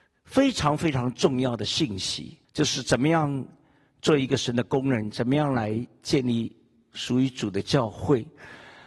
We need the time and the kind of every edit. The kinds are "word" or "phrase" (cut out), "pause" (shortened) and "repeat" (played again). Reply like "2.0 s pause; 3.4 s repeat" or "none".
2.4 s pause